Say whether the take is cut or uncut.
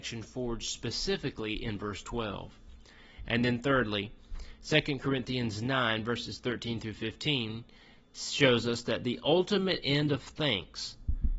uncut